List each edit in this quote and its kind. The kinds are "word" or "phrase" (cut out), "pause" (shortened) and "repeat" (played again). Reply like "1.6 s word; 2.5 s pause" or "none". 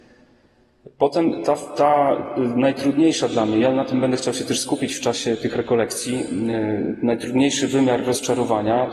none